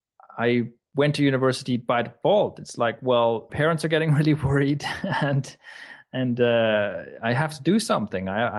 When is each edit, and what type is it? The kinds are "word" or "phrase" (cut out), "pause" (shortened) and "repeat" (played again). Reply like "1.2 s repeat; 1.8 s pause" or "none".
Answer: 3.5 s phrase